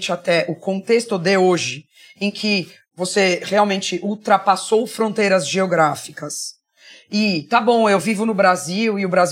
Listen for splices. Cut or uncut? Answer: uncut